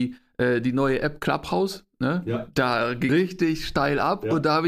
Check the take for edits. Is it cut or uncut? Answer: cut